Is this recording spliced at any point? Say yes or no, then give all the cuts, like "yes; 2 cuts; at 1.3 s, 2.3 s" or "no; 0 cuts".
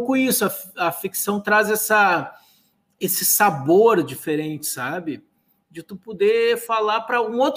no; 0 cuts